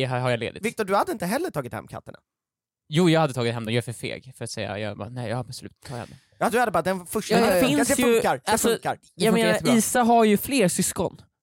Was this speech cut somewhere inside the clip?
no; 0 cuts

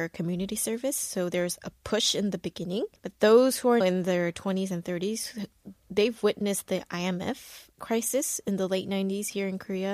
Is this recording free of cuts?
no; 2 cuts; at 3.0 s, 3.8 s

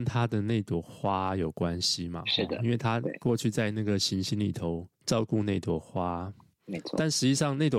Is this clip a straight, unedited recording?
no; 1 cut; at 4.9 s

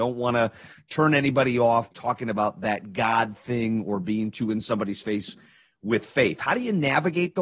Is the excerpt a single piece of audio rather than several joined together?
no; 1 cut; at 1.9 s

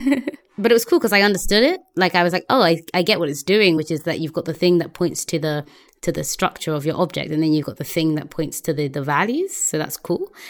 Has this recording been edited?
no; 0 cuts

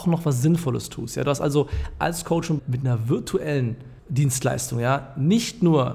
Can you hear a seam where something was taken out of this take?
yes; 2 cuts; at 2.6 s, 4.0 s

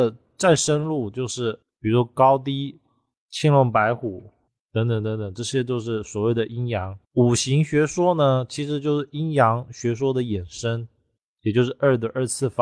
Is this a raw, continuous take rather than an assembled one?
no; 3 cuts; at 1.6 s, 3.1 s, 7.0 s

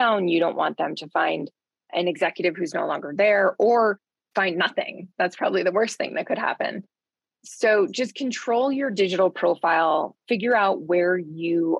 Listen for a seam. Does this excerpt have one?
no; 0 cuts

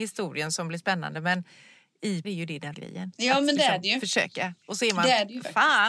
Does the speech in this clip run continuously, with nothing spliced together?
no; 2 cuts; at 2.2 s, 2.7 s

